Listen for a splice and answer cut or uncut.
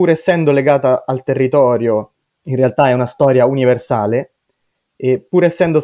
cut